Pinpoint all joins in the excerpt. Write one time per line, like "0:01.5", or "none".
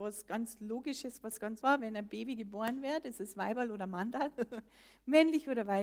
0:01.6